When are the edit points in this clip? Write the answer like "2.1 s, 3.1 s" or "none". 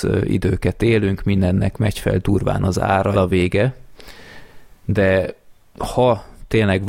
3.1 s